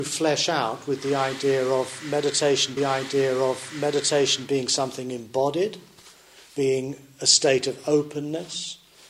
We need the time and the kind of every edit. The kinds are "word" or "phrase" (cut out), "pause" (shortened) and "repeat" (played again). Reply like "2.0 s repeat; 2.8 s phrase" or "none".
2.8 s repeat